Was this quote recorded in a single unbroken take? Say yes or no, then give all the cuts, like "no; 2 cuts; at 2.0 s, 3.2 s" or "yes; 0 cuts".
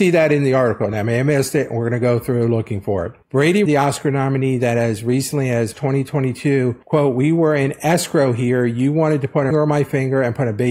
no; 3 cuts; at 3.7 s, 5.7 s, 9.5 s